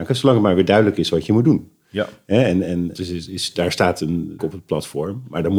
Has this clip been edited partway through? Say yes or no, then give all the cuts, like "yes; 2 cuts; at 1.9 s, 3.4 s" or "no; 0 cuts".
yes; 2 cuts; at 2.9 s, 4.4 s